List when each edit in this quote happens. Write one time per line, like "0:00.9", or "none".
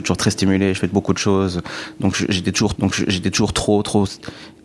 0:02.7